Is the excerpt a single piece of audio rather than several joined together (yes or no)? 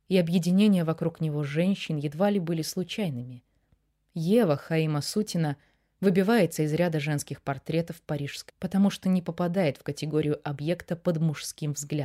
no